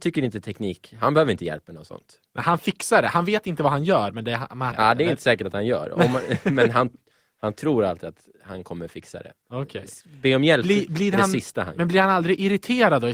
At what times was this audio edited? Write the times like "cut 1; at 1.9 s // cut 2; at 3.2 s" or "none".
cut 1; at 4.7 s